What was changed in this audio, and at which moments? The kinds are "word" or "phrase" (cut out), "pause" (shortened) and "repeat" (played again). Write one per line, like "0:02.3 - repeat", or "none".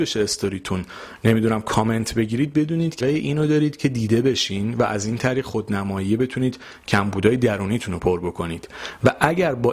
0:03.0 - word